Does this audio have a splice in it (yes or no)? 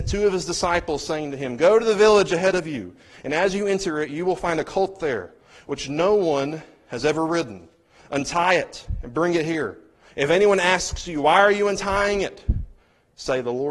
no